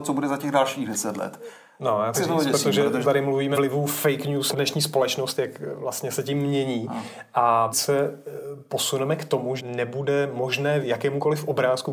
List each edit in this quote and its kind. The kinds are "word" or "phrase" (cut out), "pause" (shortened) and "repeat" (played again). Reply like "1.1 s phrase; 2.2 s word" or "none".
2.1 s word; 3.0 s word; 3.5 s word; 4.5 s word; 7.7 s word; 9.6 s word; 10.8 s word